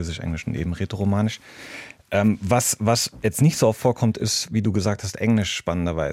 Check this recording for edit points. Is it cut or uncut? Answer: uncut